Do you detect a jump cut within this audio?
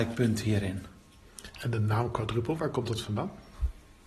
no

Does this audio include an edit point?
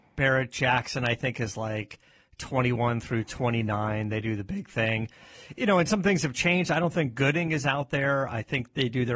no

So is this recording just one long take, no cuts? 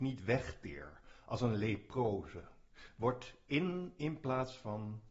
yes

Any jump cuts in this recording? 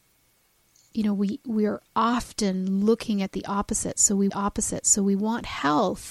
yes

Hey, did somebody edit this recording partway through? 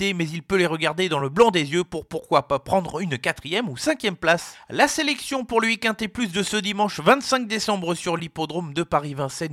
no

